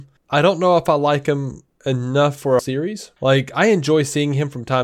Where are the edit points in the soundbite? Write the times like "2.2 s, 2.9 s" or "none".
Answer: 2.6 s, 3.2 s